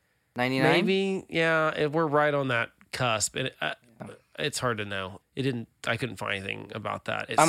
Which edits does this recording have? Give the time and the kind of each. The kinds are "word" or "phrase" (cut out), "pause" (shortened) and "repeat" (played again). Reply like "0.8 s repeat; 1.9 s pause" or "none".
5.2 s word